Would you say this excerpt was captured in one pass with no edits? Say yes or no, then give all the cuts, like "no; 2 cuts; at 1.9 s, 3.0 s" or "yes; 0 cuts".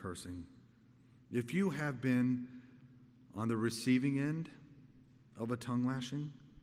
yes; 0 cuts